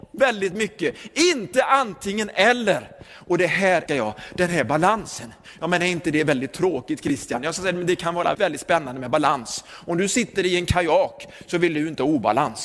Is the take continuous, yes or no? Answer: no